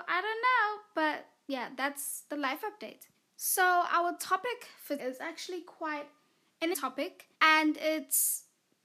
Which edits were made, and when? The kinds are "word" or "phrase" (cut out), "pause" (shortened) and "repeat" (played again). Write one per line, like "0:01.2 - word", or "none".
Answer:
0:03.1 - pause
0:05.0 - word
0:06.7 - word
0:07.3 - pause